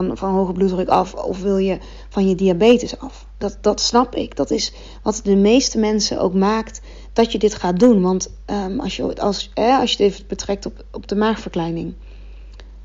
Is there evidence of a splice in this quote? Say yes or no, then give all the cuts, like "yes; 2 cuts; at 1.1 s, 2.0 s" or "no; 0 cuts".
no; 0 cuts